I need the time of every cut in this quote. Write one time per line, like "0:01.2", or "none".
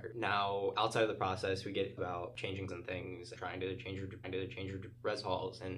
0:02.0
0:02.7
0:03.3
0:04.2